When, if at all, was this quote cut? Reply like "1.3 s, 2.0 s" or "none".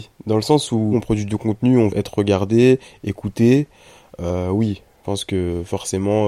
0.9 s, 1.9 s, 5.0 s